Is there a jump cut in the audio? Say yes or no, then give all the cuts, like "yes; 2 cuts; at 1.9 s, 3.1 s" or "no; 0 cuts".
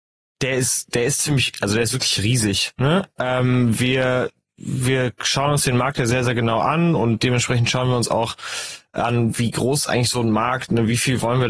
no; 0 cuts